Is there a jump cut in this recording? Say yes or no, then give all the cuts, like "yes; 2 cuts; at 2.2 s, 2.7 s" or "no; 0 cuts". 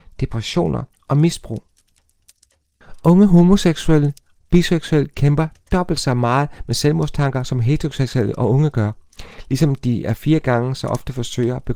no; 0 cuts